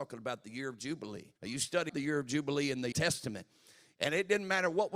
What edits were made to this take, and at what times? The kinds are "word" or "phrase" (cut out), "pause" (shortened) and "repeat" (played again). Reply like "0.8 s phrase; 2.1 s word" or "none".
1.4 s pause; 1.9 s word; 2.9 s word